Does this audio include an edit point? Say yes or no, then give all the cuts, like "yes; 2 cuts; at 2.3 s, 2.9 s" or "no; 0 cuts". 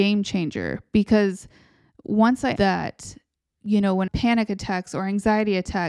yes; 2 cuts; at 2.6 s, 4.1 s